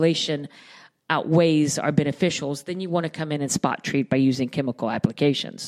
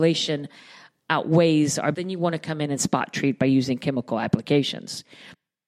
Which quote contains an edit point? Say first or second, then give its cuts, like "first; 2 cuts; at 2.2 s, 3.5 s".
second; 1 cut; at 1.9 s